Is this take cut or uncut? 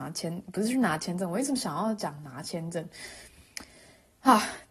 uncut